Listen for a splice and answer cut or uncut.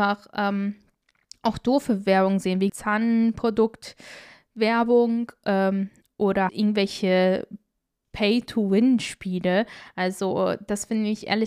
cut